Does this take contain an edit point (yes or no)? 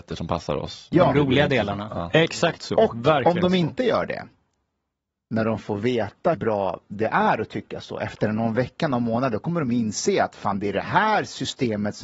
yes